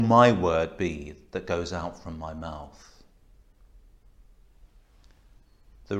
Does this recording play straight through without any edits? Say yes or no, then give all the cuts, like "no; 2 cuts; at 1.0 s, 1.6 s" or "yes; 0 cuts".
yes; 0 cuts